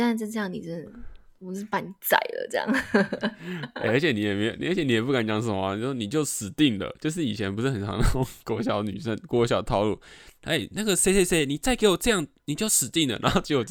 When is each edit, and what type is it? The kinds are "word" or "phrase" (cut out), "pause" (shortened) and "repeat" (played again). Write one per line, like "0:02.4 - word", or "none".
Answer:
none